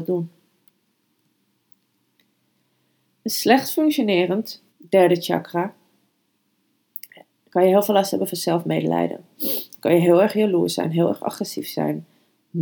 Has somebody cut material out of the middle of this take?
yes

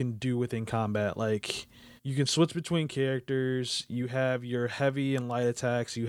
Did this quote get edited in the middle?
yes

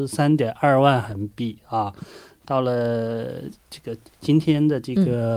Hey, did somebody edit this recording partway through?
no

